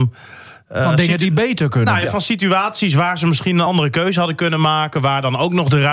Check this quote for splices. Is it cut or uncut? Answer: uncut